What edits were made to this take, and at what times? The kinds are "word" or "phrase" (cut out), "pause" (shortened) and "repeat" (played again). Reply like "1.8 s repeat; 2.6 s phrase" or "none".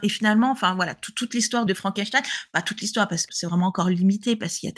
1.7 s word; 3.3 s word